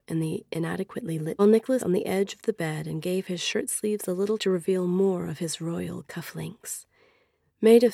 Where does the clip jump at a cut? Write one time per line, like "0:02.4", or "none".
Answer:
0:01.4
0:01.8
0:04.4